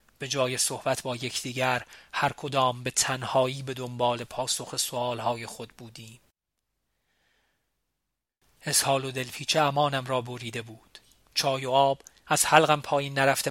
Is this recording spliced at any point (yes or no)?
no